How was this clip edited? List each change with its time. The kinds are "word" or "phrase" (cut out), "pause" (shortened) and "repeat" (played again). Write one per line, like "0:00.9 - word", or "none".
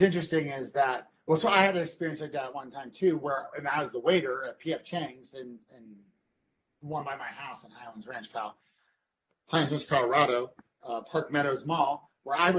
none